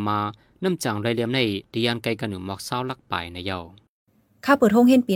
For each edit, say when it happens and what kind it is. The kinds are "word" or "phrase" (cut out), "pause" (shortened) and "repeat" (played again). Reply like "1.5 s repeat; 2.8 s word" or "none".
none